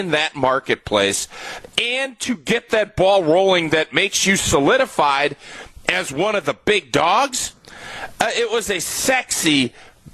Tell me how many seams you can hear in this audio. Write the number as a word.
zero